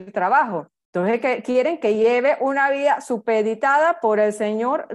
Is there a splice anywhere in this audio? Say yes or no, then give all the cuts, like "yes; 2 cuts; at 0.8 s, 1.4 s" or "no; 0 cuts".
no; 0 cuts